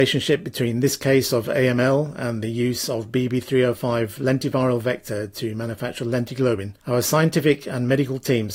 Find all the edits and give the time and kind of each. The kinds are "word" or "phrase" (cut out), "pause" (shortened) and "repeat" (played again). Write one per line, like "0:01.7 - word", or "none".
0:06.8 - pause